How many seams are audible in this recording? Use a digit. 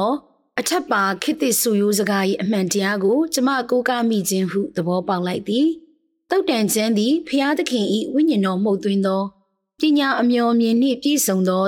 0